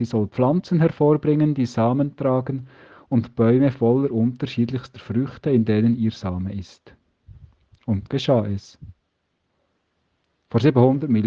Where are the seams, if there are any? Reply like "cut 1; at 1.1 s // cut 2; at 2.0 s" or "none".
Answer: cut 1; at 8.1 s

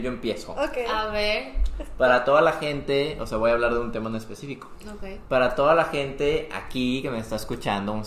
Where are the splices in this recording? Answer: none

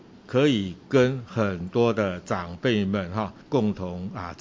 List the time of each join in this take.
cut 1; at 3.4 s

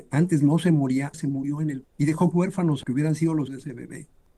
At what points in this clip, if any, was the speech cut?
cut 1; at 1.1 s // cut 2; at 1.8 s // cut 3; at 2.3 s // cut 4; at 2.8 s // cut 5; at 3.5 s

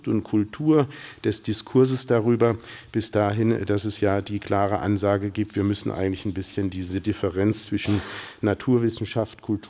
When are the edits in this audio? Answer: none

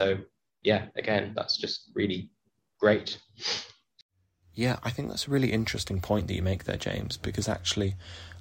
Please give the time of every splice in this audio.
none

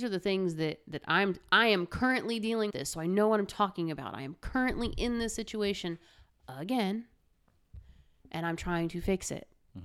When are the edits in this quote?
cut 1; at 2.7 s

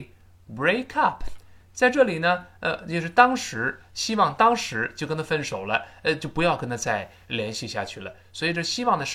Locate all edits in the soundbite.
none

